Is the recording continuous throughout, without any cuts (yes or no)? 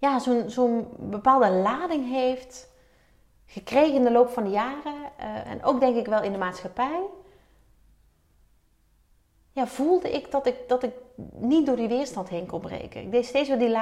no